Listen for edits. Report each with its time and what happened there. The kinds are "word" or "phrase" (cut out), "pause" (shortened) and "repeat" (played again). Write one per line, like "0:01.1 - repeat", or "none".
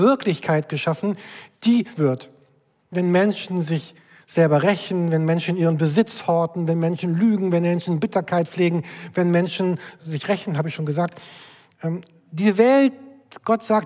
0:02.0 - word
0:02.9 - word
0:10.0 - word